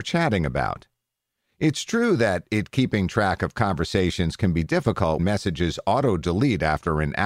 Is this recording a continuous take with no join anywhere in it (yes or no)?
no